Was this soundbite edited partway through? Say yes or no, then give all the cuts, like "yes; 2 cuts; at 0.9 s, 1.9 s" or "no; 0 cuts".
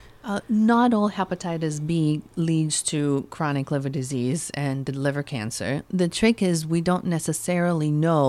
no; 0 cuts